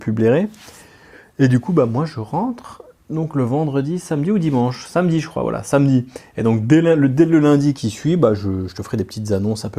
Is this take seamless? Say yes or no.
no